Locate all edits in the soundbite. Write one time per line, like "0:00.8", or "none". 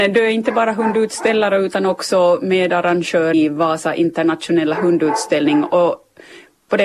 0:03.3